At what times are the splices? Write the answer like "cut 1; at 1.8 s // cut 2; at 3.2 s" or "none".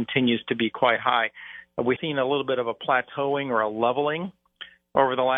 cut 1; at 2.0 s